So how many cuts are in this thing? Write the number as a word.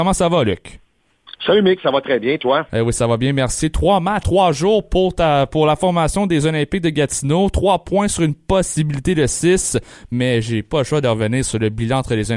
one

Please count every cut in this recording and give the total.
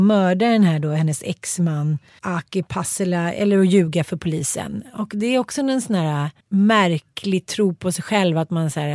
two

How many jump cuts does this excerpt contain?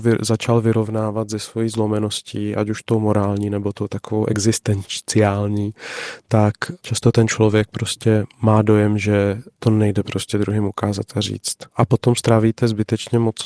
two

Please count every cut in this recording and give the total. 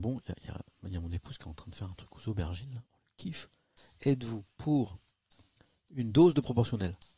zero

